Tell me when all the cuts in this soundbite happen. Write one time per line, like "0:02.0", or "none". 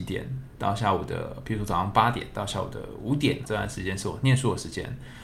0:03.4